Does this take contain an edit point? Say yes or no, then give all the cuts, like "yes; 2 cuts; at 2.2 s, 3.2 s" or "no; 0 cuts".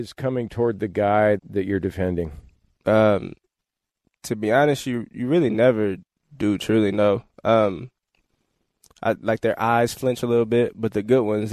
yes; 1 cut; at 1.4 s